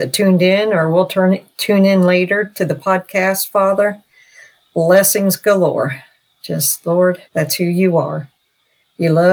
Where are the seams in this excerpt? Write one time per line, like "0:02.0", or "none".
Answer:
0:07.3